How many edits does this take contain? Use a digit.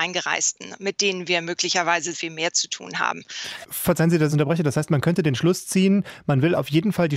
2